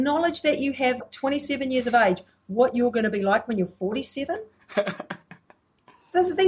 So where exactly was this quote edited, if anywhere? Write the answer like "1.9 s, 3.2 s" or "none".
1.0 s

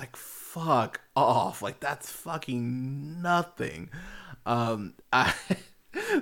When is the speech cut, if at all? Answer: 5.0 s

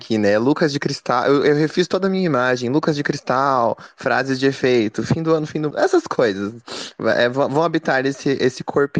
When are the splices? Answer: 5.7 s

